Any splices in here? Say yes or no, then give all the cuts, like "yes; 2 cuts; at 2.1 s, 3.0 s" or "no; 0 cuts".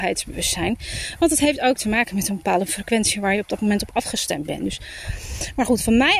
no; 0 cuts